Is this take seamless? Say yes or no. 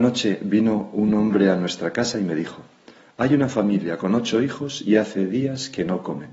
yes